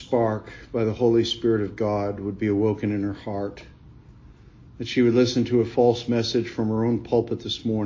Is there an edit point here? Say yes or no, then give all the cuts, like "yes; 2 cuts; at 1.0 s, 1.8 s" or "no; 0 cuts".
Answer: no; 0 cuts